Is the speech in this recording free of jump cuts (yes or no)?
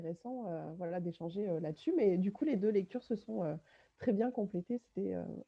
yes